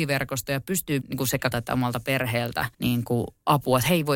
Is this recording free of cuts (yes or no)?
no